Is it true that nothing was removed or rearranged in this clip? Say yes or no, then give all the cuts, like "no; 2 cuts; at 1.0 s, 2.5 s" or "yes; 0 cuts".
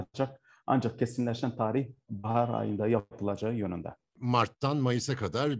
yes; 0 cuts